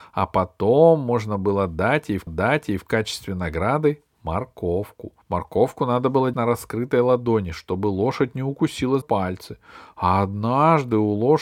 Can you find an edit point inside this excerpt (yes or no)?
yes